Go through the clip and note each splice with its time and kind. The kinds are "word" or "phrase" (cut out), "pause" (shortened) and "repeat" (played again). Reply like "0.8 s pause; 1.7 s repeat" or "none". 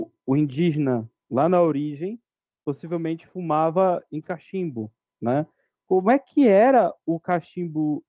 none